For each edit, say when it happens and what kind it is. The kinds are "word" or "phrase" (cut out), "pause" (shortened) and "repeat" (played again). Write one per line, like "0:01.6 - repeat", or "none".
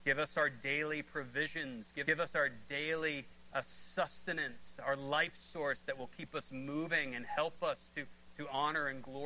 0:02.0 - word